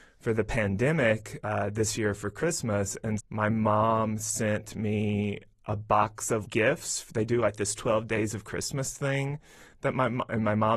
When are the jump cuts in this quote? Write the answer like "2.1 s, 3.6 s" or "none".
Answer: 1.4 s, 3.2 s, 6.4 s